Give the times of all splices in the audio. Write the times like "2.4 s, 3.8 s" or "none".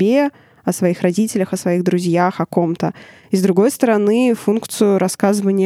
none